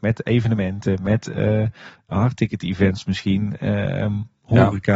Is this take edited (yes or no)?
no